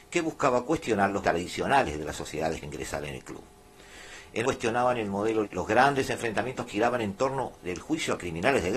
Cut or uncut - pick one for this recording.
cut